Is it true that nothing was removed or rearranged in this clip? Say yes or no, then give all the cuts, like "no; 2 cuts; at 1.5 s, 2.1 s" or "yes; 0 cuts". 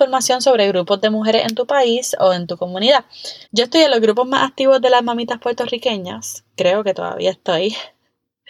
no; 1 cut; at 3.4 s